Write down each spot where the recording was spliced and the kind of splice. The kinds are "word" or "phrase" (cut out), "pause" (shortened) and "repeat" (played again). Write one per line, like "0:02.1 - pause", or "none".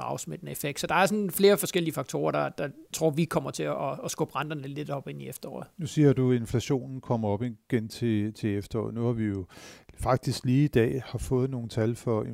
0:05.7 - pause